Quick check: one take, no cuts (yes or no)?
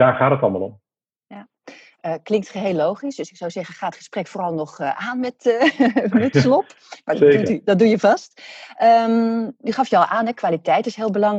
yes